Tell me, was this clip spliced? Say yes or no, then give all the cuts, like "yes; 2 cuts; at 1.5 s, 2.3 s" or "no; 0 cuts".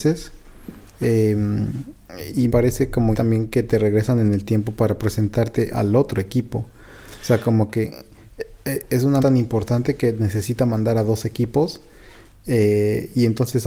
yes; 3 cuts; at 2.5 s, 3.1 s, 9.2 s